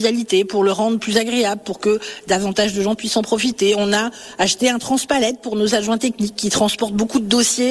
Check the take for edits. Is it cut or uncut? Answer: uncut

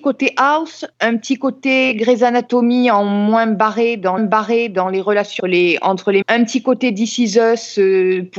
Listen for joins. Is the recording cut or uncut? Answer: cut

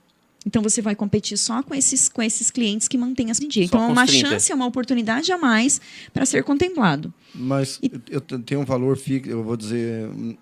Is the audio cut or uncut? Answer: cut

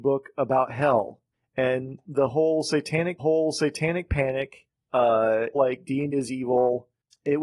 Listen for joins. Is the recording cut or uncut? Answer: cut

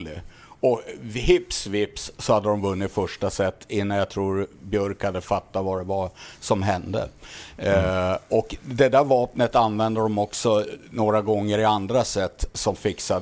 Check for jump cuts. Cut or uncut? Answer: uncut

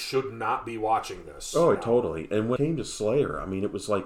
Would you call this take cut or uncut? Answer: cut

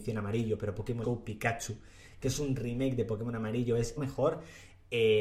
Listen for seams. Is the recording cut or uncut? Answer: cut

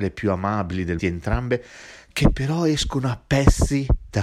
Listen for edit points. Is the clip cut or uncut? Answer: cut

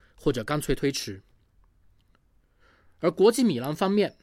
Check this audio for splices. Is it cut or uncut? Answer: uncut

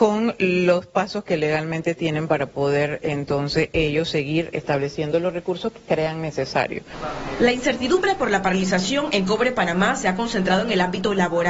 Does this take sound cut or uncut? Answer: uncut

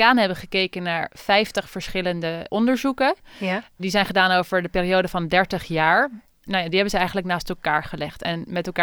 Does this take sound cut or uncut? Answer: uncut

